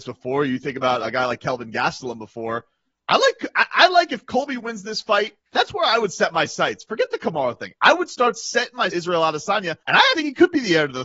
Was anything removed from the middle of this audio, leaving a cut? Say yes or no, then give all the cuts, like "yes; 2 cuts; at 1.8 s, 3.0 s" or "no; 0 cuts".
yes; 6 cuts; at 1.0 s, 2.9 s, 5.4 s, 8.9 s, 9.8 s, 10.1 s